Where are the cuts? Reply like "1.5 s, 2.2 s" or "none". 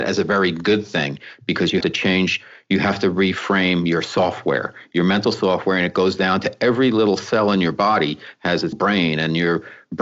1.8 s, 8.7 s